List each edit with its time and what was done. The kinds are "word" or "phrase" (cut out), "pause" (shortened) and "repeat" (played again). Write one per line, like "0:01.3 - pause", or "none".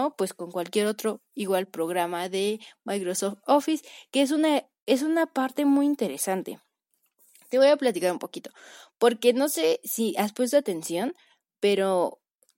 none